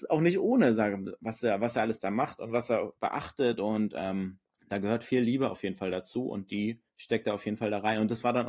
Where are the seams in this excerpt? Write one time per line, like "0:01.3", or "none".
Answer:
0:03.0
0:04.5
0:06.9